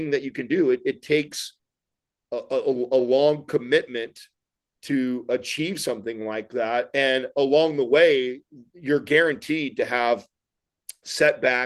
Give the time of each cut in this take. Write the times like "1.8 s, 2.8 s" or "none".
none